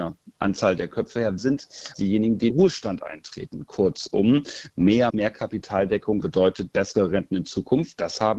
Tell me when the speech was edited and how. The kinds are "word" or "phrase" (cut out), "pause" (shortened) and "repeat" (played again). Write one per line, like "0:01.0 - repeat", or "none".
0:01.4 - word
0:01.9 - word
0:02.5 - word
0:05.1 - word
0:06.2 - phrase